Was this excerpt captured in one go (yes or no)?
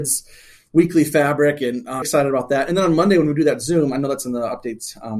no